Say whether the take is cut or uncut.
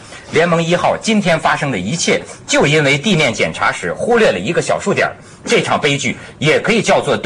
uncut